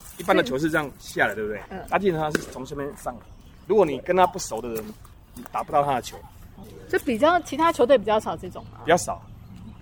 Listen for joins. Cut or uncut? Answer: uncut